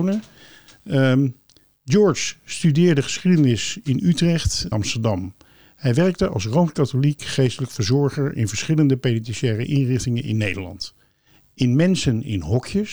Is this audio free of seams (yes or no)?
no